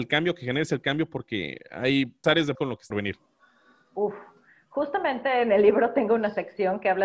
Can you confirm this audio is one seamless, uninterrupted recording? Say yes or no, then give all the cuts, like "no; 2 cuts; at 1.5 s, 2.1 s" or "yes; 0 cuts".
no; 3 cuts; at 2.2 s, 2.5 s, 2.9 s